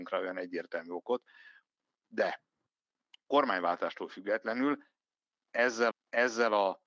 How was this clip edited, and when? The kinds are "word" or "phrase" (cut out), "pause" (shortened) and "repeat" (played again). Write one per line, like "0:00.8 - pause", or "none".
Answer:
0:05.9 - repeat